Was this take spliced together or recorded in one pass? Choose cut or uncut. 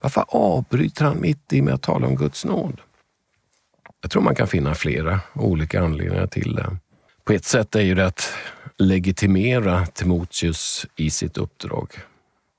cut